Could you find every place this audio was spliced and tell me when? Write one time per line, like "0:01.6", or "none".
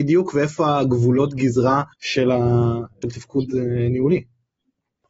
0:01.9
0:03.0

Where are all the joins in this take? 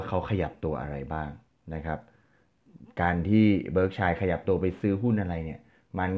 0:01.5

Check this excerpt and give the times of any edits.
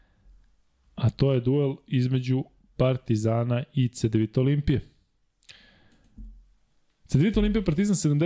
none

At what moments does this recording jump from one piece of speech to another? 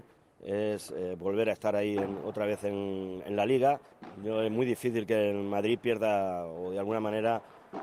none

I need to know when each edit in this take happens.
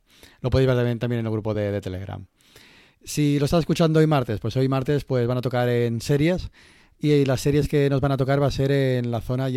none

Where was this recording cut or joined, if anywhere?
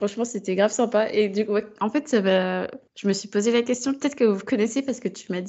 0:02.9

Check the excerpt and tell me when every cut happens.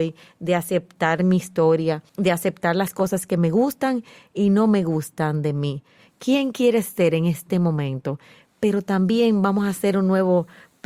0:02.1

